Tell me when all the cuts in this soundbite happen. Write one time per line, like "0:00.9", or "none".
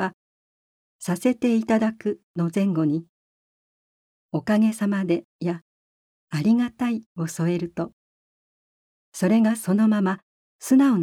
0:05.3